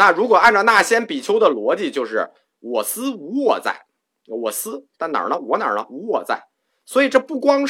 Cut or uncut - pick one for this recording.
uncut